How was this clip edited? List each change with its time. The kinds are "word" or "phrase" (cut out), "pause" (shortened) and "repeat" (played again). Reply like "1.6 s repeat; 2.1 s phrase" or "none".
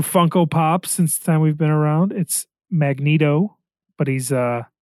1.2 s word